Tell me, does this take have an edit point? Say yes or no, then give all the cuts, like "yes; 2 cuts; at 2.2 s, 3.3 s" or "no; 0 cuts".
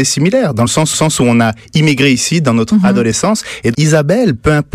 yes; 2 cuts; at 0.9 s, 3.7 s